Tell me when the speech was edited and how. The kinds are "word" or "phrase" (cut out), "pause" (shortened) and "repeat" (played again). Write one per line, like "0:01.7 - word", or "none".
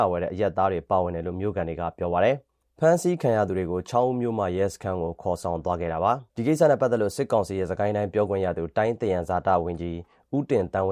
0:06.3 - pause